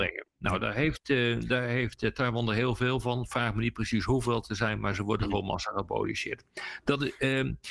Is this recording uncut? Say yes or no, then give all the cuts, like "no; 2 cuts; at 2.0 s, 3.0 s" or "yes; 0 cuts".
yes; 0 cuts